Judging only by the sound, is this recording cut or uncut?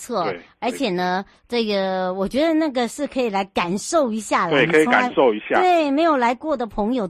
uncut